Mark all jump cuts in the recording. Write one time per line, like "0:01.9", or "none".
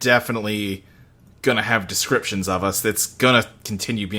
none